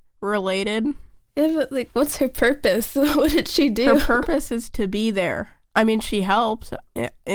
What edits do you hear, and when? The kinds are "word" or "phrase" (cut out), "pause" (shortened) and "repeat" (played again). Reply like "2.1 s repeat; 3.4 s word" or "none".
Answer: none